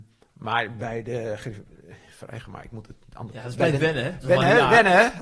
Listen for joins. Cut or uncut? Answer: uncut